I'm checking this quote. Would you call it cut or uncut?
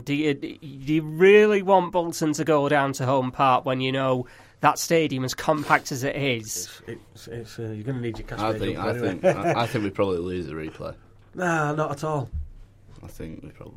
uncut